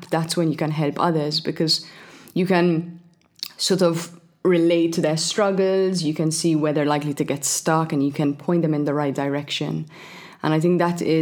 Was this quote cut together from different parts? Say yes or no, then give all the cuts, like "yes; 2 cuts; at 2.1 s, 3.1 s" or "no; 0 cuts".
no; 0 cuts